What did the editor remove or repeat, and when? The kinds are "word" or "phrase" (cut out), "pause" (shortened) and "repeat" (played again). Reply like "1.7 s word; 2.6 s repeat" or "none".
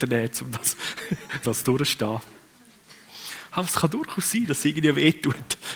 1.4 s word